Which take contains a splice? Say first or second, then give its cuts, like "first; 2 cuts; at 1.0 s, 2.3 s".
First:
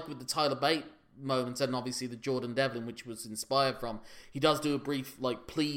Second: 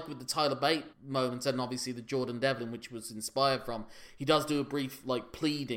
second; 1 cut; at 0.9 s